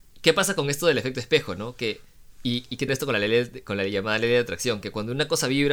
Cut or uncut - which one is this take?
cut